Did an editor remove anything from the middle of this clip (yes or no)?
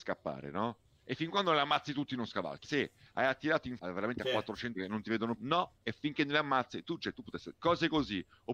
yes